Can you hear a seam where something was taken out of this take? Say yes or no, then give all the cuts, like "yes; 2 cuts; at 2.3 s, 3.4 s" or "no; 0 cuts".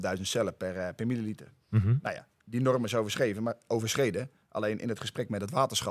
no; 0 cuts